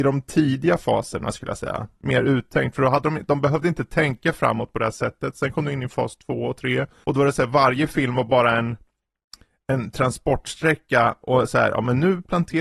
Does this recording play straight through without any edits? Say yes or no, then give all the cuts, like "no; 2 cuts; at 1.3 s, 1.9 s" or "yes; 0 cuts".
yes; 0 cuts